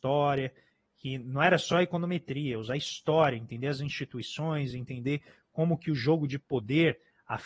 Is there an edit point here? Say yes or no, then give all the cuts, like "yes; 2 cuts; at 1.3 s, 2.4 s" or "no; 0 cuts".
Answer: no; 0 cuts